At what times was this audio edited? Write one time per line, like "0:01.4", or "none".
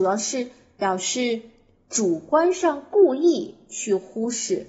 none